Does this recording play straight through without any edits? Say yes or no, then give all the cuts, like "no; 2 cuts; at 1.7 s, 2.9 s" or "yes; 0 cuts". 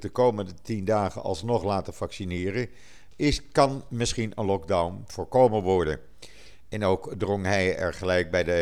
yes; 0 cuts